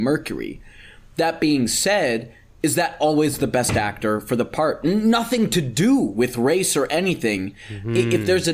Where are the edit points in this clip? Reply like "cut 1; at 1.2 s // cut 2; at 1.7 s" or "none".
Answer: none